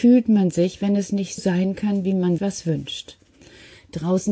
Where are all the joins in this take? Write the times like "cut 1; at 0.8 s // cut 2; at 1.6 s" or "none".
cut 1; at 1.4 s // cut 2; at 2.4 s